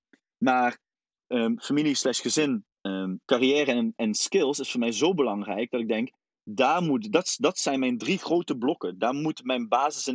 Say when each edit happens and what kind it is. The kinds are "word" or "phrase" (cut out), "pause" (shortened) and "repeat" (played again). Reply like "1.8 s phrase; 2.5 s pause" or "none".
2.7 s pause